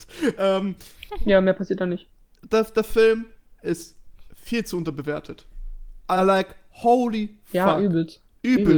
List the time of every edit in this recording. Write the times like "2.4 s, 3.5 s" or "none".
none